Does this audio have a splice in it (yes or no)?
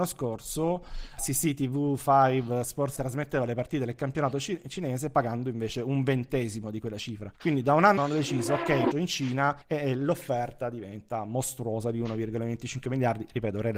yes